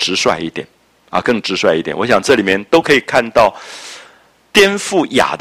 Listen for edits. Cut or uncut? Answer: uncut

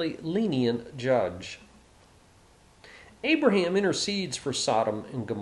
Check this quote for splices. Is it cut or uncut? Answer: uncut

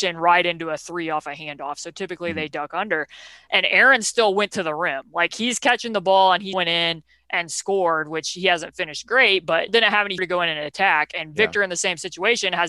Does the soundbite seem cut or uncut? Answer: cut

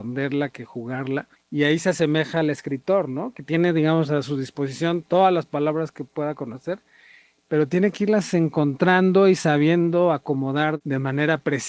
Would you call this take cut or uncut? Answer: cut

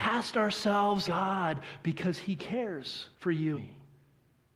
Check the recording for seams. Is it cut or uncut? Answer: cut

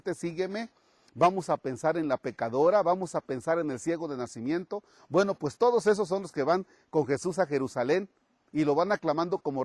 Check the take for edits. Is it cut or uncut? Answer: uncut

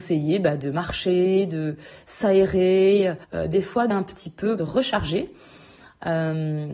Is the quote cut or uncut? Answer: cut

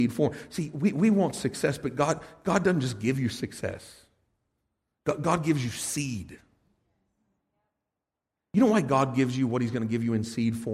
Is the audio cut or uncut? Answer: uncut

